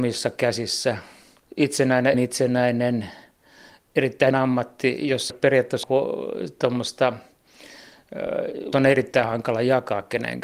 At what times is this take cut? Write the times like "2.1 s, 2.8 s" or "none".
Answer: 2.1 s, 4.3 s, 5.3 s, 5.8 s, 8.7 s

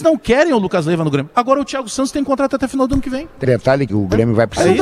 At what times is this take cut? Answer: 3.4 s, 3.9 s

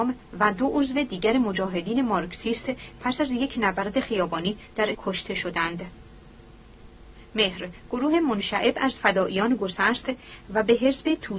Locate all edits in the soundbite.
4.9 s

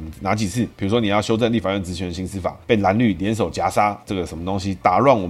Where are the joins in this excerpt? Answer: 4.0 s

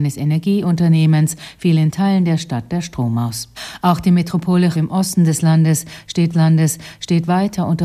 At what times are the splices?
4.7 s, 6.3 s

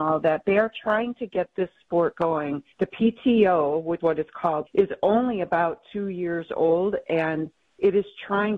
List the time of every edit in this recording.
2.7 s, 4.0 s, 4.7 s

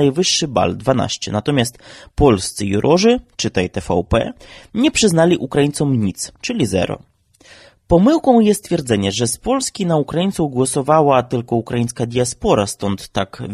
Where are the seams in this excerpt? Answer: none

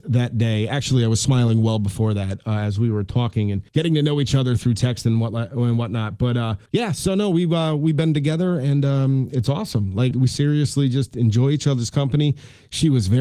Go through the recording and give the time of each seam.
3.7 s, 6.7 s, 10.1 s

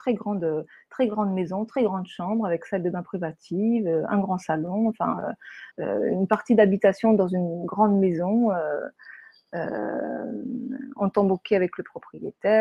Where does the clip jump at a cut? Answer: 5.7 s

